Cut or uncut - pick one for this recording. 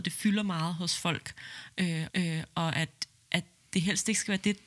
cut